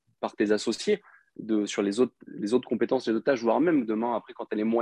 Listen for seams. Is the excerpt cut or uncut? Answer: uncut